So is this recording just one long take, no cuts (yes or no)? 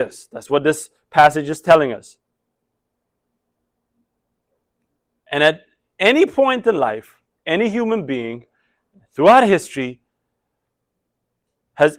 yes